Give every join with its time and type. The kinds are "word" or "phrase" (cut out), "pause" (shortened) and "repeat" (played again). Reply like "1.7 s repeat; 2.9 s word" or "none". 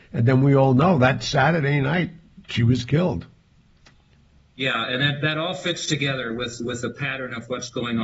none